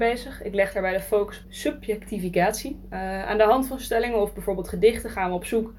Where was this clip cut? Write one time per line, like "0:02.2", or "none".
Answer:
0:01.4